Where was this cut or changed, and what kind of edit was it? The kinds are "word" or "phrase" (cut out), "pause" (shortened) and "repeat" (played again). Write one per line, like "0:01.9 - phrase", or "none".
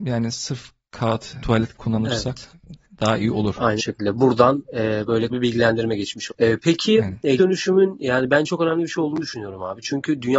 0:01.4 - word
0:01.7 - word
0:03.8 - word
0:05.3 - word
0:06.3 - word
0:07.4 - word